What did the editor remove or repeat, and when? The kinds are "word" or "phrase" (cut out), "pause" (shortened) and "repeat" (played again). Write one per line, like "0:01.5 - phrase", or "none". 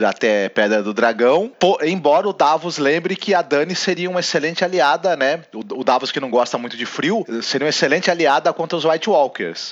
none